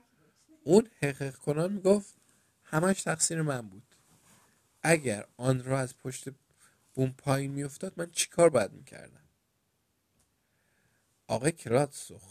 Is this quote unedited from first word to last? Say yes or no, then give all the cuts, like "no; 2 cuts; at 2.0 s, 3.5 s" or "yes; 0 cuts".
yes; 0 cuts